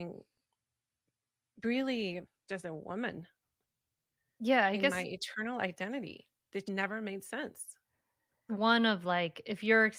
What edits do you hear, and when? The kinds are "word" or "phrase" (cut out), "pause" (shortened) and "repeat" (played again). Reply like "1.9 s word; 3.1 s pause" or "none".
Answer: 2.5 s word; 6.6 s word; 8.5 s phrase

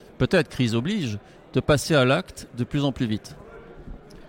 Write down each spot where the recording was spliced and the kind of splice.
none

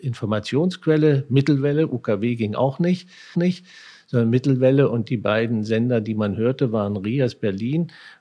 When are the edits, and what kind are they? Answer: 3.3 s repeat

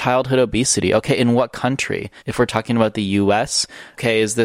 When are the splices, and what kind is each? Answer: 2.2 s pause

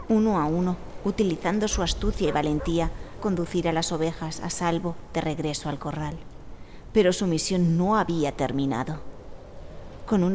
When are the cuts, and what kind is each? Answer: 3.2 s word

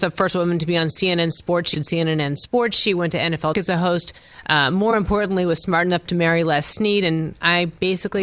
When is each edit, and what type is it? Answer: 1.7 s word; 3.5 s word

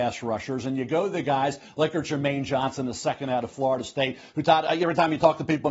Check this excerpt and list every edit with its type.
none

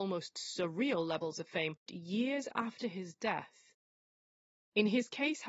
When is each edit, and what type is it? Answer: 1.9 s word

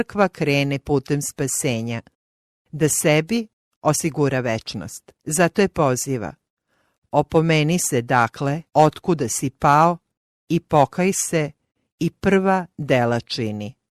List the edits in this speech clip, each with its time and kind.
5.2 s pause; 8.7 s pause

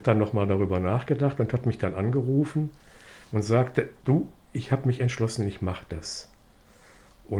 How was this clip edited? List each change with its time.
none

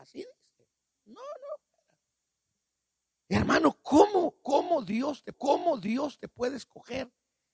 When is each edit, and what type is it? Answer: 5.3 s repeat

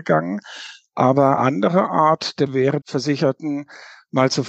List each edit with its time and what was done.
1.4 s word; 2.5 s word; 2.8 s word

